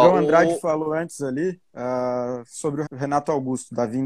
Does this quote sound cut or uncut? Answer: cut